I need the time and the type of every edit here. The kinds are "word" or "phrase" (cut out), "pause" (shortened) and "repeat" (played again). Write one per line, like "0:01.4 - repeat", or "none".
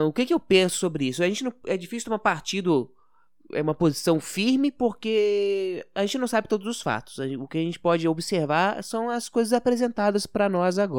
none